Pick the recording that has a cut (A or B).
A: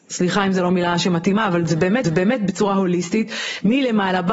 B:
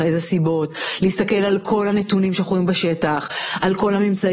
A